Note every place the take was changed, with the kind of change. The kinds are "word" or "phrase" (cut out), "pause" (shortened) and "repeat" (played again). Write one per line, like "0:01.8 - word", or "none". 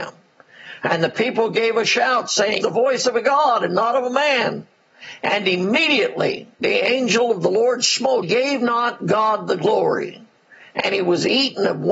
0:02.6 - word
0:06.5 - pause
0:08.2 - phrase